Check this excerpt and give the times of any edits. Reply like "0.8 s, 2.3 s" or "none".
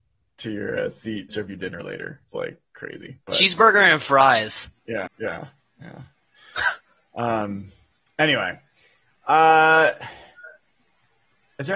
1.3 s, 2.2 s, 3.2 s, 5.1 s